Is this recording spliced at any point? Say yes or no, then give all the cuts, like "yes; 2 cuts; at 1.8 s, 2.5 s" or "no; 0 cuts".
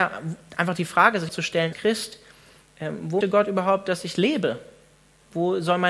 yes; 3 cuts; at 1.3 s, 1.7 s, 3.2 s